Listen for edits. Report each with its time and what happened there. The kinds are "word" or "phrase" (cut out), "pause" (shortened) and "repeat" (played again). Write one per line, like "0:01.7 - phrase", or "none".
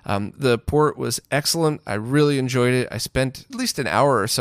0:03.5 - phrase